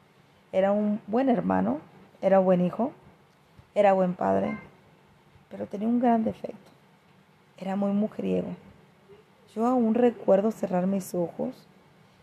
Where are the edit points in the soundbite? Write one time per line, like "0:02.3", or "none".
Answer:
none